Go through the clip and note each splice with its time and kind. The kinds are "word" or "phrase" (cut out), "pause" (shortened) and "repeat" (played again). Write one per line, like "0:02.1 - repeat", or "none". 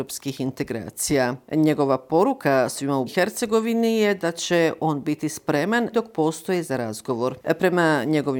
0:03.1 - word
0:05.9 - word
0:06.6 - word